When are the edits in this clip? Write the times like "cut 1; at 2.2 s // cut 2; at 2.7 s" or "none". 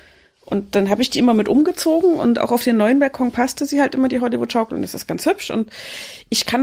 none

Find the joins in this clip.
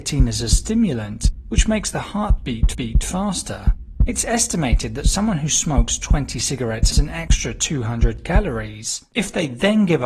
cut 1; at 2.7 s // cut 2; at 6.9 s

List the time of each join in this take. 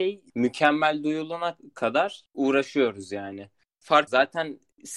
cut 1; at 4.1 s

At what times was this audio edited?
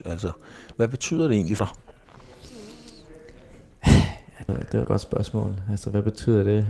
cut 1; at 1.6 s // cut 2; at 4.5 s // cut 3; at 4.8 s

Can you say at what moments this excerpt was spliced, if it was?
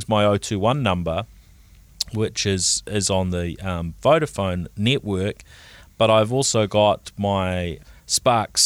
none

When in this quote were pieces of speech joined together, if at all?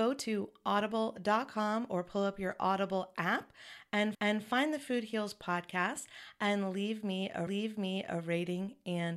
cut 1; at 4.1 s // cut 2; at 7.5 s

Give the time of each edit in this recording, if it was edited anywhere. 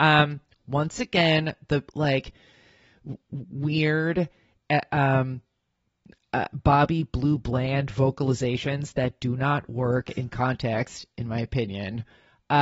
none

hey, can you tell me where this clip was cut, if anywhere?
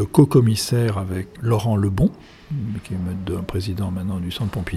cut 1; at 1.4 s

